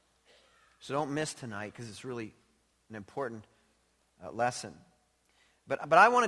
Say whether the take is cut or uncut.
uncut